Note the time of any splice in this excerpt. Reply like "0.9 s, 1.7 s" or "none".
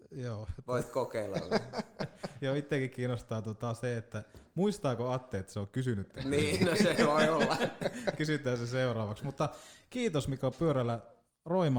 none